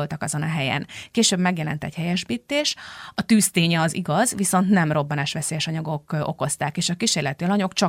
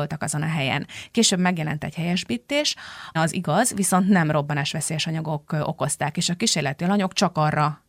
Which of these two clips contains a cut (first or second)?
second